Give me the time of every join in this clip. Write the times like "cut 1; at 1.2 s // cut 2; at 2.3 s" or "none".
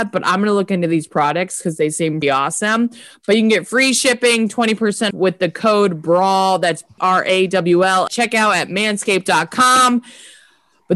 cut 1; at 2.2 s // cut 2; at 5.1 s // cut 3; at 7.0 s // cut 4; at 8.1 s